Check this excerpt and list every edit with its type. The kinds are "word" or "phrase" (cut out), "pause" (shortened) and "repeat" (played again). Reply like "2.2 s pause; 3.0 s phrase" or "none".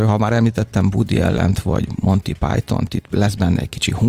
none